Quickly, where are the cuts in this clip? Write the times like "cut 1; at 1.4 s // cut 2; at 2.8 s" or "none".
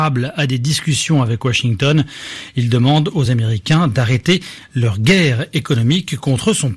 none